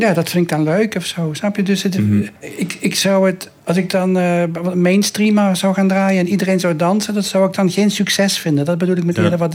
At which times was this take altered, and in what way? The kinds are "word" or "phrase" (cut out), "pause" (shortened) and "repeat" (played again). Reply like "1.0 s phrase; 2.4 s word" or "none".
2.4 s pause; 3.6 s pause